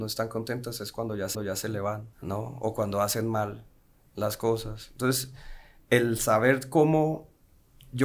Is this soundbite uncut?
no; 2 cuts; at 1.3 s, 2.1 s

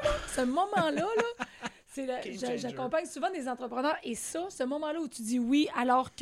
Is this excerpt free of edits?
yes; 0 cuts

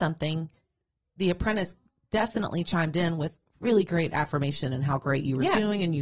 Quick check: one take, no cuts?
yes; 0 cuts

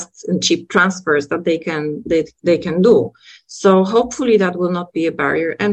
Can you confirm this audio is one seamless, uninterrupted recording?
yes; 0 cuts

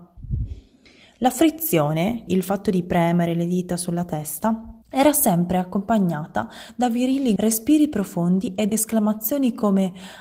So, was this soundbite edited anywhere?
yes; 4 cuts; at 2.3 s, 4.8 s, 7.4 s, 8.7 s

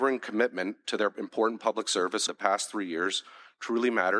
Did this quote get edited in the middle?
yes; 1 cut; at 2.3 s

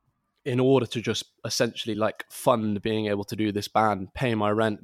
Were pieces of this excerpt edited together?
no; 0 cuts

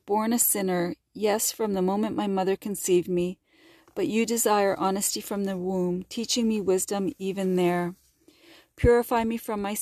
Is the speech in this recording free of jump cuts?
yes; 0 cuts

